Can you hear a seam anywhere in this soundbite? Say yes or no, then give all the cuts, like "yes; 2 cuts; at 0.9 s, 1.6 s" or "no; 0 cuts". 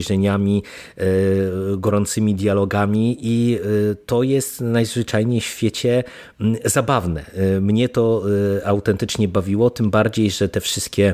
no; 0 cuts